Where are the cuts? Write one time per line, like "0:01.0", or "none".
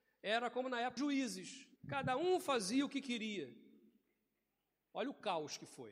0:01.0
0:01.8